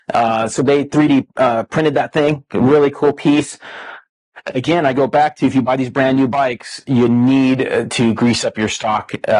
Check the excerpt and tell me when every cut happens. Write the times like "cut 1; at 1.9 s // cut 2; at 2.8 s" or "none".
none